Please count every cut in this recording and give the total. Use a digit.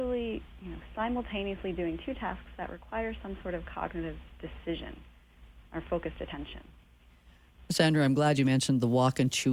0